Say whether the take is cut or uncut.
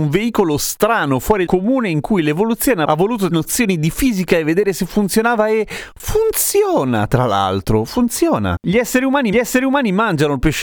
cut